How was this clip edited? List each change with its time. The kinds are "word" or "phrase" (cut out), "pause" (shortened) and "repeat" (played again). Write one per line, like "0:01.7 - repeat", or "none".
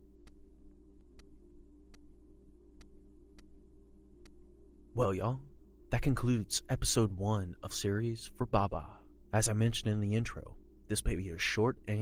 0:07.7 - word